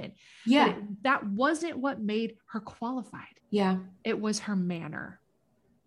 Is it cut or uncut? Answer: cut